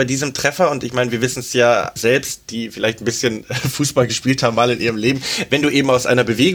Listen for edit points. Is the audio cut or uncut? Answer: cut